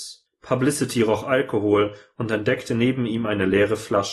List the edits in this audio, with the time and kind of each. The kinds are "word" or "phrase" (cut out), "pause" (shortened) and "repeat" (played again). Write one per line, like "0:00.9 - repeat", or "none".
none